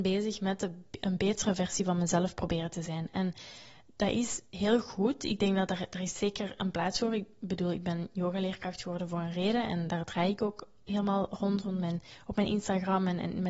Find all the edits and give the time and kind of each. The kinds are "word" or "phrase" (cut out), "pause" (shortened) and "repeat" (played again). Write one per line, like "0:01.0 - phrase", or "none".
none